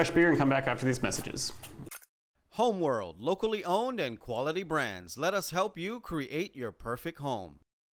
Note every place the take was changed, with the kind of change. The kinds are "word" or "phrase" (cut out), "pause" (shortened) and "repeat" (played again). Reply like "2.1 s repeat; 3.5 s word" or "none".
none